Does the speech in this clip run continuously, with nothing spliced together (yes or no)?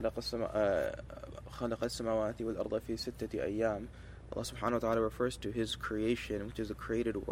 yes